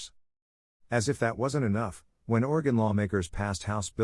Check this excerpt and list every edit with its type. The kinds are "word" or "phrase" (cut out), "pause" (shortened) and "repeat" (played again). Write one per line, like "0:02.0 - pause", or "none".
none

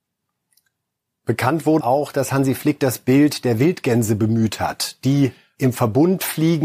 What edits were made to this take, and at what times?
0:01.8 - word

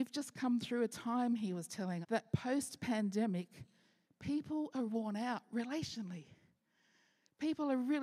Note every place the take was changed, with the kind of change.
0:02.0 - word
0:04.9 - word

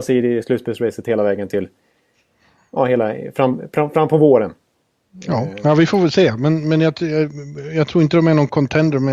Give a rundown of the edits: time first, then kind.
none

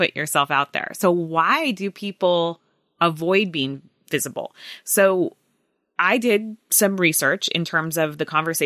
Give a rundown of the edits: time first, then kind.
none

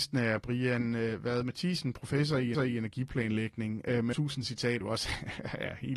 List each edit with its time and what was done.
0:02.5 - repeat
0:04.1 - word
0:04.8 - word

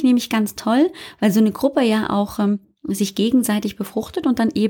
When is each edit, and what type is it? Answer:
none

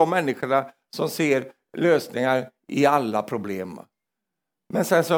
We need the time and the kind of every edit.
none

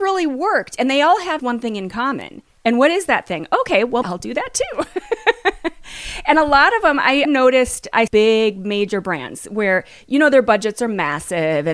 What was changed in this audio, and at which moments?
0:01.4 - word
0:04.0 - word
0:07.2 - word
0:08.1 - phrase

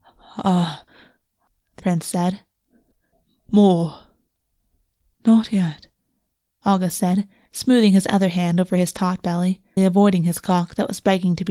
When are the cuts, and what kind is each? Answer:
0:01.8 - word
0:09.8 - word

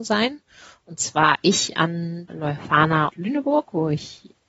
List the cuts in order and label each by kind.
0:02.3 - word
0:03.1 - word

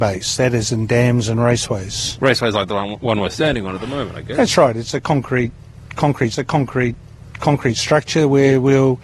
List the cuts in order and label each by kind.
0:06.3 - repeat

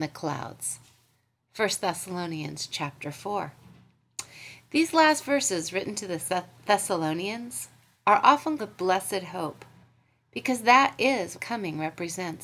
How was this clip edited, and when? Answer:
0:08.6 - word
0:11.3 - phrase

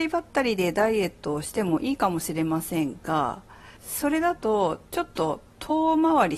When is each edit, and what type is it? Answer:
0:03.8 - pause
0:04.9 - pause

